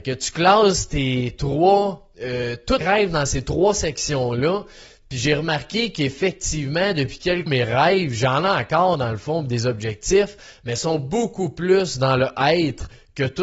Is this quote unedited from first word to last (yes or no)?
no